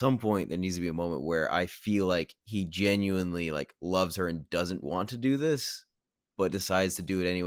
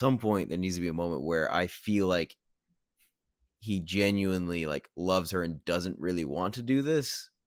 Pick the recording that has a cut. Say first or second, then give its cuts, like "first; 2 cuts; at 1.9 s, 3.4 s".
first; 2 cuts; at 2.4 s, 4.8 s